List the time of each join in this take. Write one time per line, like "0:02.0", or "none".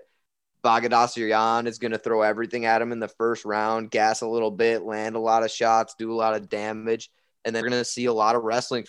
0:07.6